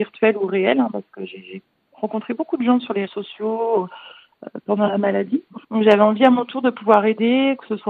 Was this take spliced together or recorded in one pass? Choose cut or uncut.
cut